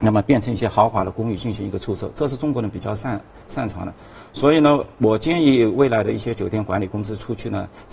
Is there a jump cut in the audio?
no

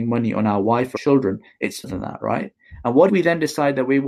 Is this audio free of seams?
no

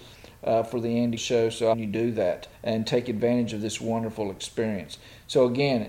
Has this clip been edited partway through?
yes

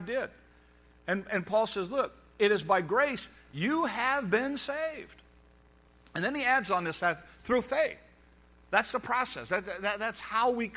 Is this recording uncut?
yes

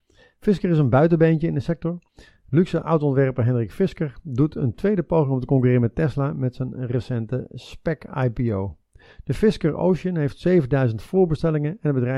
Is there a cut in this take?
no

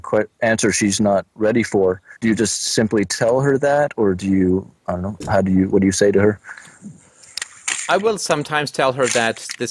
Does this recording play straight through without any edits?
no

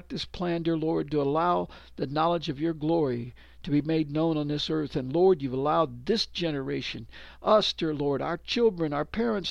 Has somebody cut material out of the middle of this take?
no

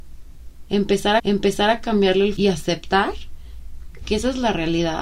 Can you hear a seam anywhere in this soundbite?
yes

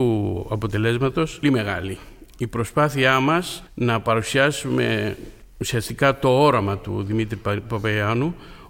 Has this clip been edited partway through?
yes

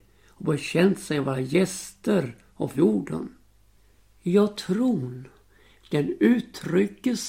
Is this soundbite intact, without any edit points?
no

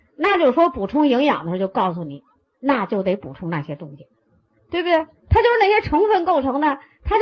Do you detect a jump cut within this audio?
no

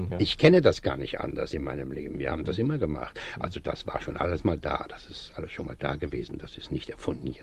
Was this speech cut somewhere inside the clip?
no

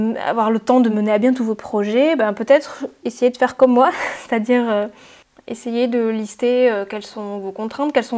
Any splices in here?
no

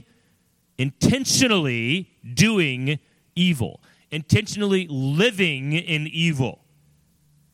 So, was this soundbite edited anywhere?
no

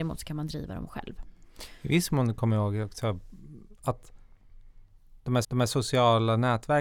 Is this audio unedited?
no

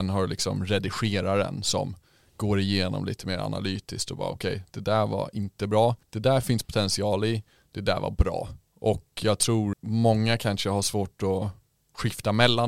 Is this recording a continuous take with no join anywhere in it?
no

